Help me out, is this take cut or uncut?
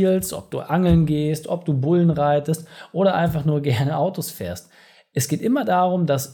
uncut